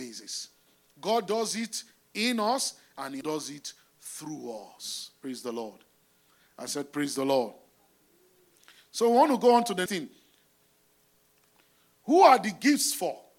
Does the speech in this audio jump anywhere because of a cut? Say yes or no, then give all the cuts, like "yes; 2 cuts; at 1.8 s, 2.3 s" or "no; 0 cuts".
yes; 2 cuts; at 3.2 s, 9.9 s